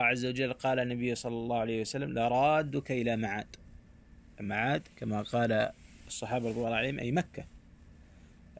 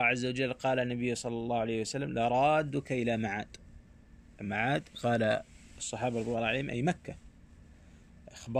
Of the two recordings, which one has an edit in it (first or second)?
second